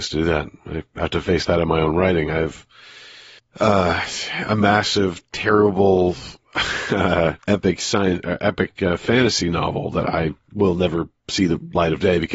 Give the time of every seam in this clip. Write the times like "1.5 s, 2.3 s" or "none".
3.4 s, 7.4 s